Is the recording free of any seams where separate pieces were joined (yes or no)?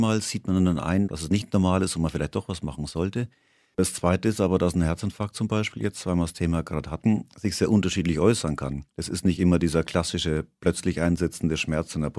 yes